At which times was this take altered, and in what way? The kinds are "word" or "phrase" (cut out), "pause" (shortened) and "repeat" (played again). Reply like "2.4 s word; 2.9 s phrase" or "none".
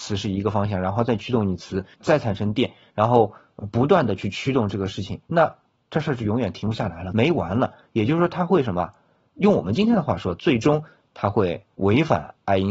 1.9 s pause; 5.3 s pause